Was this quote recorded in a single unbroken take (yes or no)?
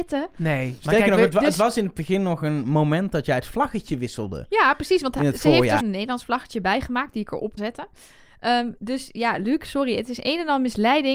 no